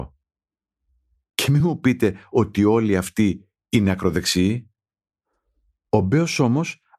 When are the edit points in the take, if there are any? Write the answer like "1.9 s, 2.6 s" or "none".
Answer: none